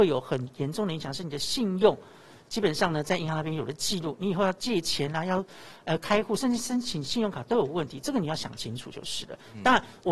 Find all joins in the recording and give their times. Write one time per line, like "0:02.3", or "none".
none